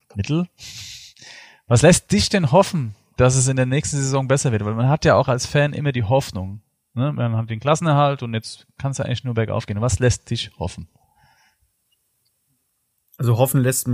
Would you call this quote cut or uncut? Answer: uncut